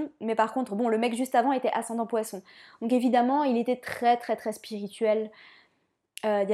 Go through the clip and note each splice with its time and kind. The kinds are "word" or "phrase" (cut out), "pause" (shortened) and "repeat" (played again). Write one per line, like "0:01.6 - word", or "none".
none